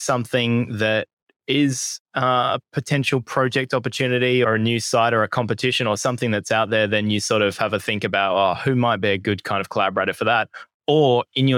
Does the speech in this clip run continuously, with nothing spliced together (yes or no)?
no